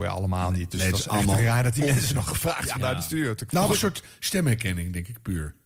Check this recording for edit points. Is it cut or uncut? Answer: cut